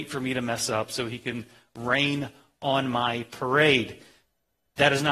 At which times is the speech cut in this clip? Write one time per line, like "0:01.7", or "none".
none